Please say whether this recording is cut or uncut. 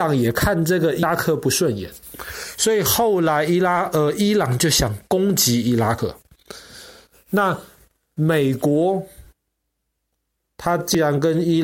uncut